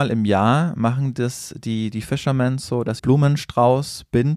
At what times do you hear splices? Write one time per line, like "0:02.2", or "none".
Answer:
0:03.0